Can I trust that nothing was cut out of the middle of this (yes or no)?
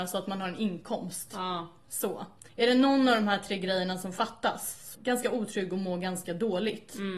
no